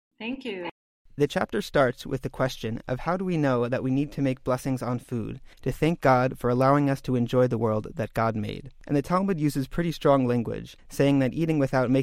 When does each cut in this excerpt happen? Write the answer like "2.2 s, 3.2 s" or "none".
5.5 s, 10.8 s

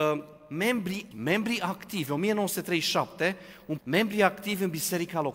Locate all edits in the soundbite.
1.1 s, 3.8 s

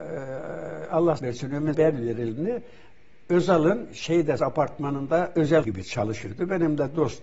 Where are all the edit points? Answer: 1.2 s, 1.7 s, 4.4 s, 5.6 s

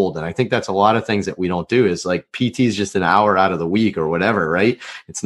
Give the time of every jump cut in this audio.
none

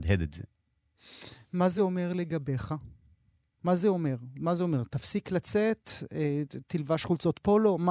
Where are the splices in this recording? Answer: none

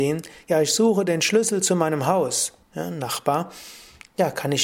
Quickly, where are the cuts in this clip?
2.6 s

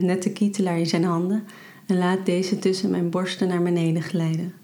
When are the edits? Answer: none

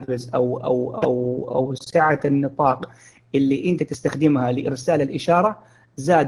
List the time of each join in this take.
none

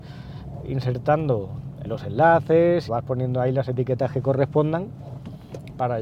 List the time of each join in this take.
1.8 s, 2.9 s

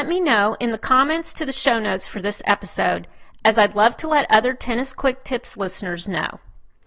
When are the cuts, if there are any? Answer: none

